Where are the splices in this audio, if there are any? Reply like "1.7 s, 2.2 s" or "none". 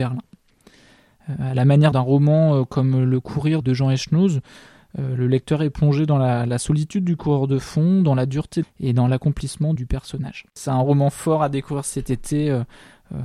1.9 s, 3.6 s, 8.6 s, 9.8 s